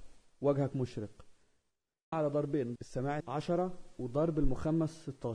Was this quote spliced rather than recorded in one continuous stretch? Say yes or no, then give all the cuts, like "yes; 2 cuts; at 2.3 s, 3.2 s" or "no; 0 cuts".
yes; 3 cuts; at 2.1 s, 2.8 s, 3.2 s